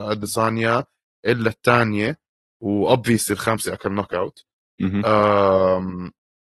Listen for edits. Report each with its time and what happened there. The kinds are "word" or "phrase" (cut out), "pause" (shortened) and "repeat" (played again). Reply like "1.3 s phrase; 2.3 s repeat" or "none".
none